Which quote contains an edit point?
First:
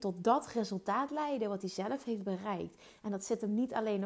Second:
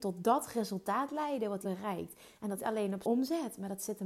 second; 3 cuts; at 1.6 s, 2.6 s, 3.0 s

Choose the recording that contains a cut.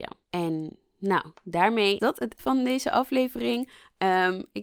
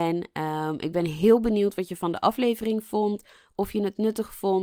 first; 2 cuts; at 2.0 s, 2.4 s

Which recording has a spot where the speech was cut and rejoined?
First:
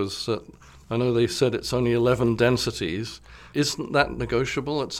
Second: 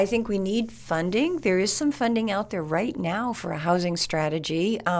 first; 1 cut; at 3.5 s

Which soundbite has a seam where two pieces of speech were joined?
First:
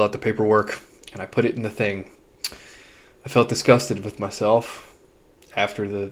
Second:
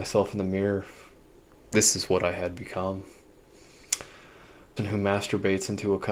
second; 1 cut; at 4.8 s

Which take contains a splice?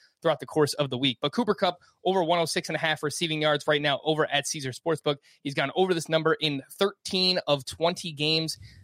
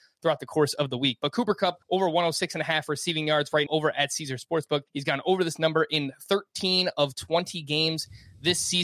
second; 3 cuts; at 1.8 s, 3.7 s, 4.9 s

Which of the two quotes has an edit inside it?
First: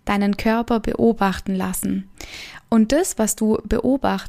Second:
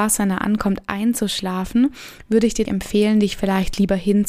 second; 1 cut; at 2.7 s

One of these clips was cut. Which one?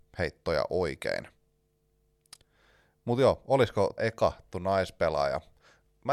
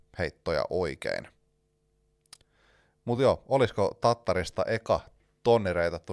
first; 2 cuts; at 4.0 s, 4.5 s

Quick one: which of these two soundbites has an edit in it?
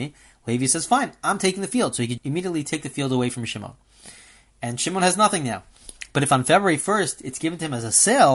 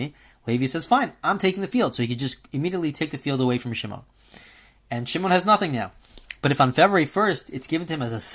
first; 1 cut; at 2.2 s

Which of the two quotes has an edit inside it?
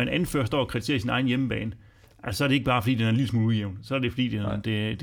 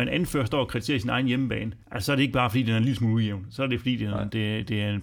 second; 1 cut; at 1.8 s

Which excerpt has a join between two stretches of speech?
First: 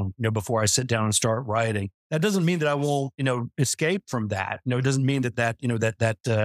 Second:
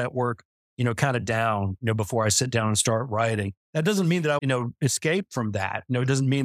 second; 1 cut; at 4.4 s

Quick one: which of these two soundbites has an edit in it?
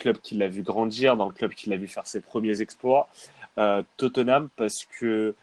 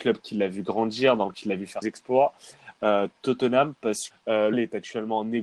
second; 4 cuts; at 1.3 s, 1.8 s, 4.1 s, 4.5 s

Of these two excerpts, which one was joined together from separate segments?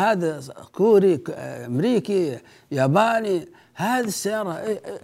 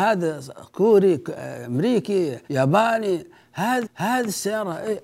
second; 2 cuts; at 2.4 s, 3.8 s

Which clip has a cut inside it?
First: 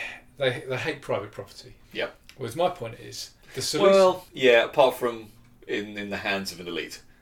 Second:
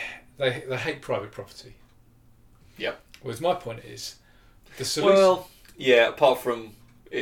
first; 3 cuts; at 1.8 s, 3.4 s, 4.3 s

